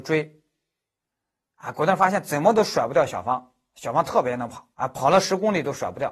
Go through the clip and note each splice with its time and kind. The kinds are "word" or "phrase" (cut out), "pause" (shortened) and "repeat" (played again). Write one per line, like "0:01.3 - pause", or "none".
0:04.7 - pause